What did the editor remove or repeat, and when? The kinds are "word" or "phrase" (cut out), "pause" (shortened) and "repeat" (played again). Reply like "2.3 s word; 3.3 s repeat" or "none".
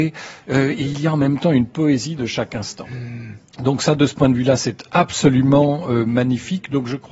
none